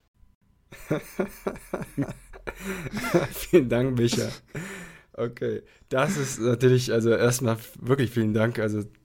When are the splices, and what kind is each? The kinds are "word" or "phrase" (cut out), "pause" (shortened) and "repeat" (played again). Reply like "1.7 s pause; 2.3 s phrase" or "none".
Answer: none